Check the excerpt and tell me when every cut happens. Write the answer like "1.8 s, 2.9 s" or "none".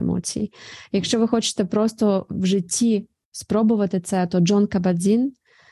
none

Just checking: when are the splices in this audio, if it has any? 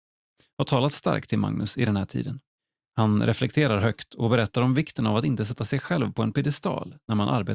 2.6 s

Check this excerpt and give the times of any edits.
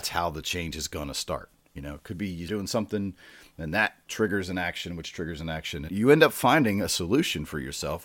2.5 s, 5.9 s

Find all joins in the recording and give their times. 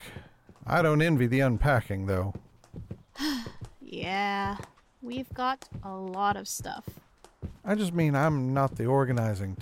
none

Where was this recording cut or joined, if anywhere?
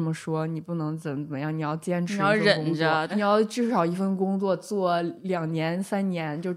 3.1 s

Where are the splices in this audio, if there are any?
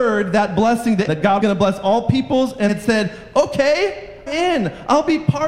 1.1 s, 1.4 s, 2.7 s, 4.3 s

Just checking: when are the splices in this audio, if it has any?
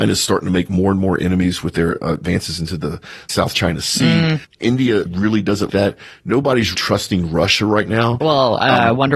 5.1 s, 5.7 s, 6.7 s

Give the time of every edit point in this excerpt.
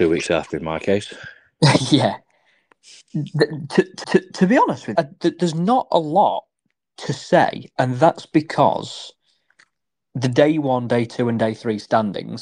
4.0 s, 5.0 s

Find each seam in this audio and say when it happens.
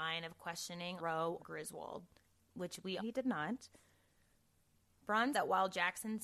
1.0 s, 1.4 s, 2.2 s, 3.0 s, 5.3 s

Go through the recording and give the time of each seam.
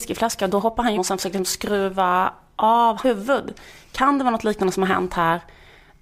1.0 s, 3.0 s

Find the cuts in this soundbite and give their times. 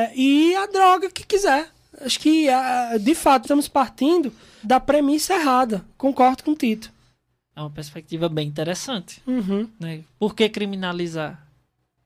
3.4 s, 4.6 s

